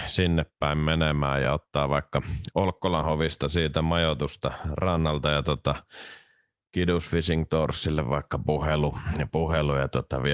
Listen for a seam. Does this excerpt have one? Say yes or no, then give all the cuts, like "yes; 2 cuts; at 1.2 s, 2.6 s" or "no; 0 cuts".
no; 0 cuts